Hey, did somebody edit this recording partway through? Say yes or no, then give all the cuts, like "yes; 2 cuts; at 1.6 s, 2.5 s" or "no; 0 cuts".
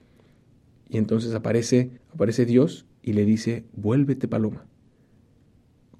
yes; 2 cuts; at 2.0 s, 3.0 s